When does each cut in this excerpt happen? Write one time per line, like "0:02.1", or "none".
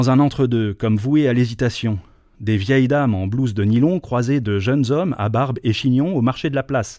none